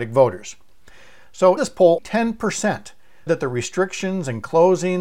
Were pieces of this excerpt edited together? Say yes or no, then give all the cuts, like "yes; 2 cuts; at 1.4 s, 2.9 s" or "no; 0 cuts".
yes; 3 cuts; at 1.6 s, 2.0 s, 3.3 s